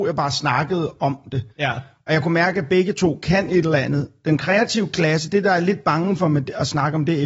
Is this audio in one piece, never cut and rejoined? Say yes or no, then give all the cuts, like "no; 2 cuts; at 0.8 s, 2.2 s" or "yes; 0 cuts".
no; 1 cut; at 1.5 s